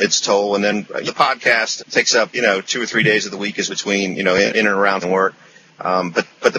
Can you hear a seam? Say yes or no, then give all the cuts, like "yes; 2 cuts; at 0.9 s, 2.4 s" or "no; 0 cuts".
yes; 6 cuts; at 1.1 s, 1.8 s, 2.3 s, 3.7 s, 4.5 s, 5.0 s